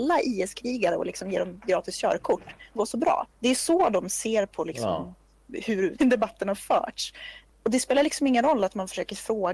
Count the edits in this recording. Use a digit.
3